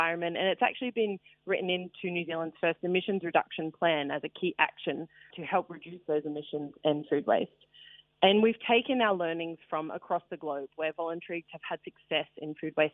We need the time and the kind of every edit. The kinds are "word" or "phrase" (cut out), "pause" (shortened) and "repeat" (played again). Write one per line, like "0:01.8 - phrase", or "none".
0:05.3 - word
0:11.5 - word